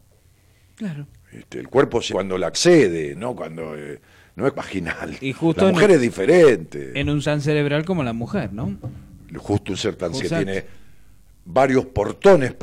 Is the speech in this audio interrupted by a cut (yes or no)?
yes